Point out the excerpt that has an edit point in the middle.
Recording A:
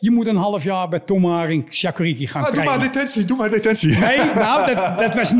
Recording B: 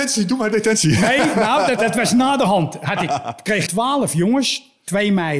B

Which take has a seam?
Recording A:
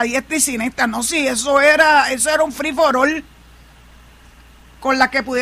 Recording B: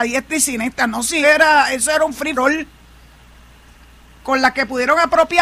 B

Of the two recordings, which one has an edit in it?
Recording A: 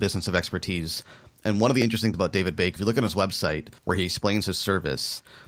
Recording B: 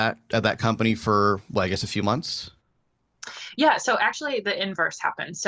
A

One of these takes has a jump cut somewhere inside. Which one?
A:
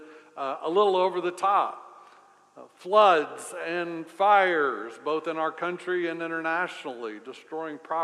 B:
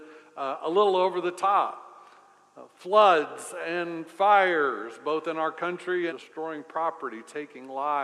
B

